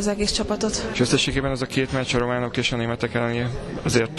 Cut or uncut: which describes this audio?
uncut